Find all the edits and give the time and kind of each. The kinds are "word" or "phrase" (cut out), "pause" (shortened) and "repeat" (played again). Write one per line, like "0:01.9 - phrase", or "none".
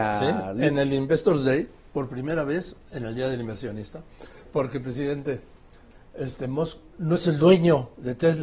none